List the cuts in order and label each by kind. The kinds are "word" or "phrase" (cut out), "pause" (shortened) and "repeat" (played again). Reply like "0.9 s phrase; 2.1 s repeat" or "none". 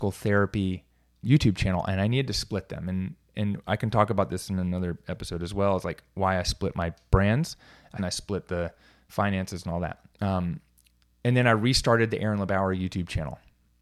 1.2 s word; 8.0 s phrase; 10.1 s pause